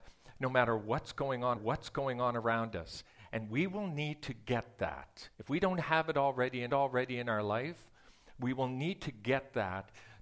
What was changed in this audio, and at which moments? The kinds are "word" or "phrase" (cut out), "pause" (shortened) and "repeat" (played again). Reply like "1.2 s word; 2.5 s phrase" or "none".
1.6 s repeat; 5.3 s pause; 6.7 s repeat